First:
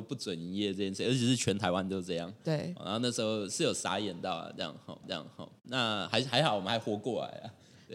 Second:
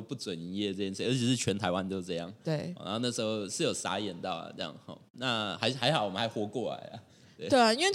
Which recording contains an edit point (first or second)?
first